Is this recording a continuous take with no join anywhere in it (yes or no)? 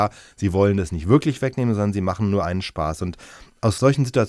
yes